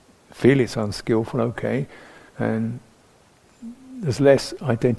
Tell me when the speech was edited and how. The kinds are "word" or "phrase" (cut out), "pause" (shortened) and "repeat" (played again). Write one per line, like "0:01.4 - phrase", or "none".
0:02.3 - pause